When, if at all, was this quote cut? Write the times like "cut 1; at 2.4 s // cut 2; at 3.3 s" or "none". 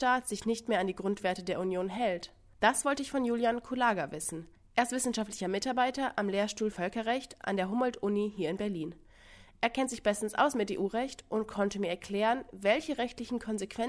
cut 1; at 6.7 s